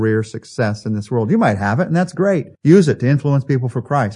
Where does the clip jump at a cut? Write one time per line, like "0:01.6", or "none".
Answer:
0:02.5